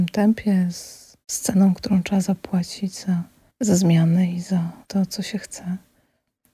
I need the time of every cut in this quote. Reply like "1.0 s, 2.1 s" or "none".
1.2 s, 3.5 s, 4.8 s